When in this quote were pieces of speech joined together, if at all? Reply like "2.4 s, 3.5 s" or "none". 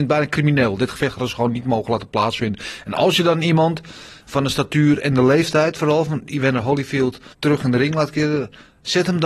7.3 s